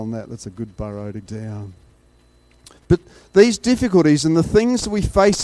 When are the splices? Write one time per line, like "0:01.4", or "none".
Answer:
0:01.2

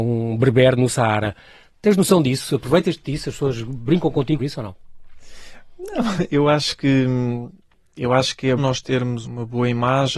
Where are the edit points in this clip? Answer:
0:04.4
0:08.6
0:09.2

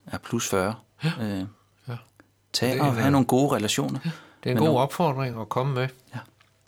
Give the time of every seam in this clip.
none

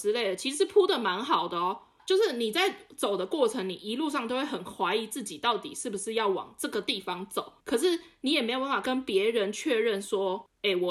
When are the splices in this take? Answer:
0:07.6

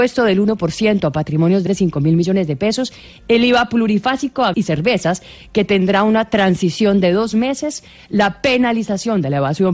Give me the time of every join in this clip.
0:01.7
0:04.5

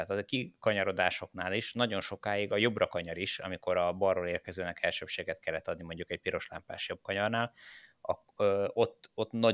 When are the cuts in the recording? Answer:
none

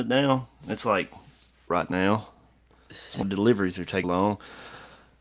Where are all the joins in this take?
0:01.7
0:03.2
0:04.0

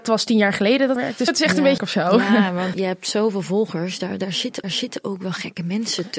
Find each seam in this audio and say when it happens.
0:01.0
0:01.3
0:01.8
0:02.7
0:04.6

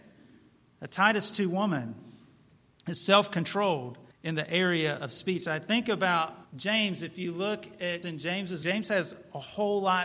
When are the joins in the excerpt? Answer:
0:04.1
0:06.4
0:08.0
0:08.6

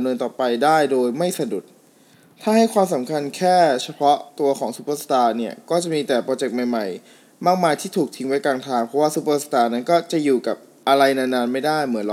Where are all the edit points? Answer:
0:04.3

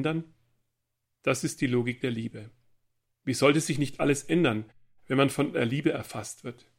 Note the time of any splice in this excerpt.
none

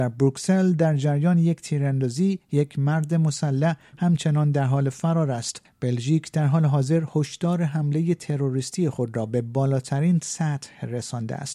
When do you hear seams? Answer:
0:05.6

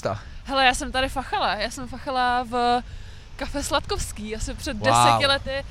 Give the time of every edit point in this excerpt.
none

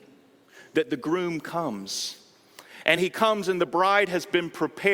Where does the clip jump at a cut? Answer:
none

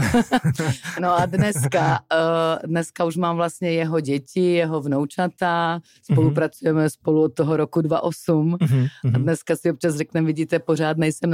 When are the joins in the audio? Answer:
none

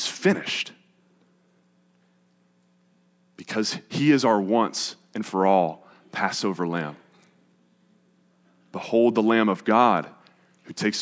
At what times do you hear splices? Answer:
none

